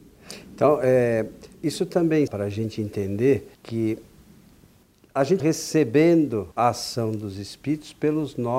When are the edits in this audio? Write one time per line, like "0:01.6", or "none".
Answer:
0:01.5
0:02.3
0:03.5
0:05.4
0:06.5